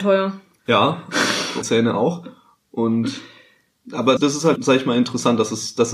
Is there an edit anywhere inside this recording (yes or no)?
yes